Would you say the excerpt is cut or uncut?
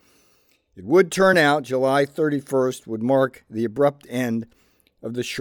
uncut